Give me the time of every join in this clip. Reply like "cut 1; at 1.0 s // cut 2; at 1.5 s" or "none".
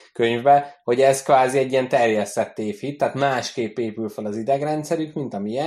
none